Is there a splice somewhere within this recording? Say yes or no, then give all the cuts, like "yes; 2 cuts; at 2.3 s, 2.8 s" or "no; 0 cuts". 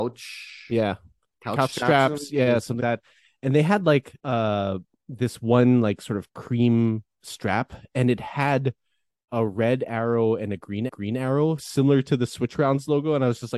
yes; 3 cuts; at 2.8 s, 4.2 s, 10.9 s